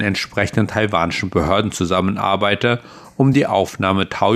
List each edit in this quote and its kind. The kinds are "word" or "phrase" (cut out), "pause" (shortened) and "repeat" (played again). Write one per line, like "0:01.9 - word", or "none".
none

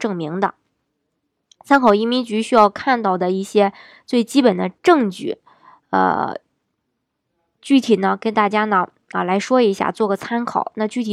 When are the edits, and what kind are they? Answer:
0:04.8 - pause

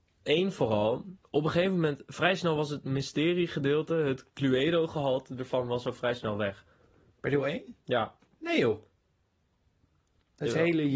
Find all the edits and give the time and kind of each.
0:01.2 - pause
0:07.8 - pause

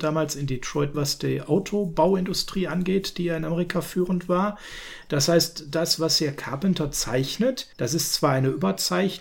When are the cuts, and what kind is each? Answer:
0:00.9 - word
0:07.7 - pause

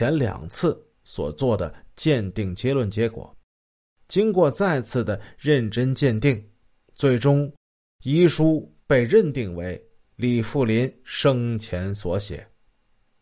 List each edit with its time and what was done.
none

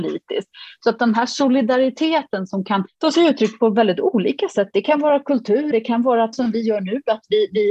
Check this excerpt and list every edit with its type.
0:02.9 - pause
0:05.7 - word
0:06.3 - word

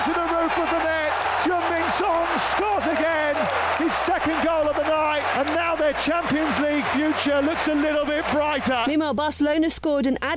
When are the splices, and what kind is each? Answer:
none

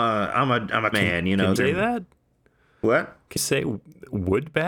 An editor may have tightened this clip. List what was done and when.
0:00.9 - word
0:01.6 - word
0:03.4 - word

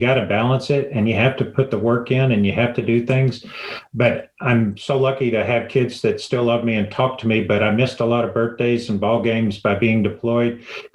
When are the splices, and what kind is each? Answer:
none

